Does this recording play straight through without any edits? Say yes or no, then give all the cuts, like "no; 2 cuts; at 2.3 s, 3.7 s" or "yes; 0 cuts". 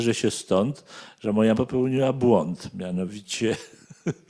no; 1 cut; at 1.5 s